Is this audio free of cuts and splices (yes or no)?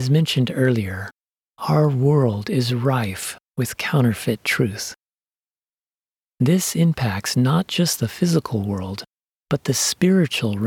yes